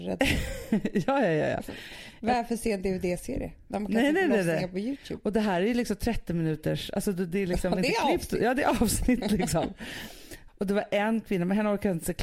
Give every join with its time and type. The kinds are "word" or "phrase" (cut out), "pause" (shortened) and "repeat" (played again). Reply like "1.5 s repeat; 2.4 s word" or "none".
none